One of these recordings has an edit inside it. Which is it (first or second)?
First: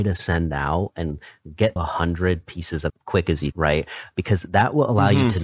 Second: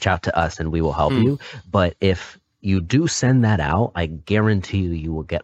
first